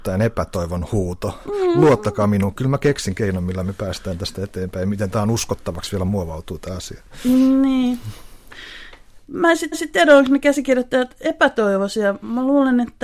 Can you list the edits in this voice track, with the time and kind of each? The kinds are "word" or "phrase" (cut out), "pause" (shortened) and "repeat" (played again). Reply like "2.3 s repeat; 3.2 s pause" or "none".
9.7 s repeat